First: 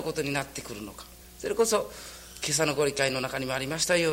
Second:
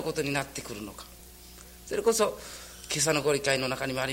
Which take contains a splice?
first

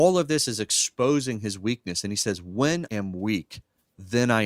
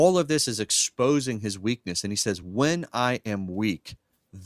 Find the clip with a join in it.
first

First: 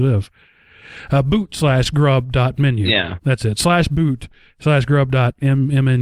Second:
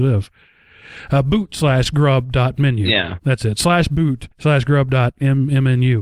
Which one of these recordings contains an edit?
second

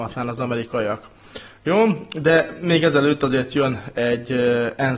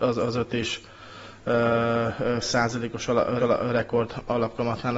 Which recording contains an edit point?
second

